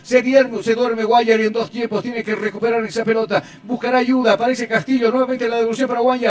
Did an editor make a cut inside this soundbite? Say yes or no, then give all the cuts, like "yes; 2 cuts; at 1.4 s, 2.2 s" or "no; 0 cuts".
no; 0 cuts